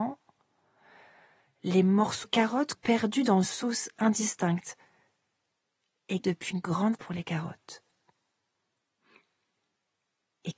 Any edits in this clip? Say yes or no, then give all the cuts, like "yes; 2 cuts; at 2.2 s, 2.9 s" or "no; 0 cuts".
yes; 6 cuts; at 2.2 s, 2.7 s, 3.4 s, 6.2 s, 6.5 s, 6.9 s